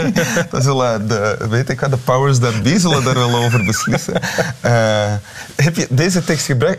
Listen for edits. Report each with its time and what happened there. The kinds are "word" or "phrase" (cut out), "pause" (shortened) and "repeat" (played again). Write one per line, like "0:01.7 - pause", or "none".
none